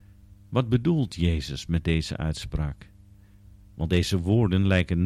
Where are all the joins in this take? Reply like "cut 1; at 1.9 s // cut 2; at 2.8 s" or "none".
none